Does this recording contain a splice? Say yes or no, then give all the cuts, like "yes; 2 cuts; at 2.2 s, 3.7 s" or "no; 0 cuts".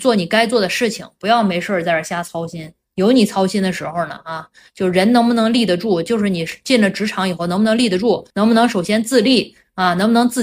yes; 1 cut; at 8.3 s